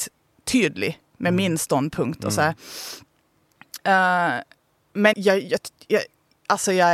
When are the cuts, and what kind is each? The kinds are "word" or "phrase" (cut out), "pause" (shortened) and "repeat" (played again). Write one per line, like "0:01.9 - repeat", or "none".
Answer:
0:05.1 - word